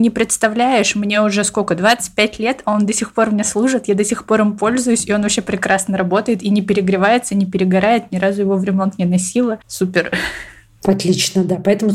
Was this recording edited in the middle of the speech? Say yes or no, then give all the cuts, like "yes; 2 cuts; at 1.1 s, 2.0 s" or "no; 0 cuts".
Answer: no; 0 cuts